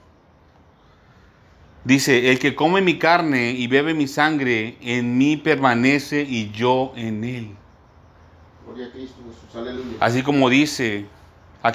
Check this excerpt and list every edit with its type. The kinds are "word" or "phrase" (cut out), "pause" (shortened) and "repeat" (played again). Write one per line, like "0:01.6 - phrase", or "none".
none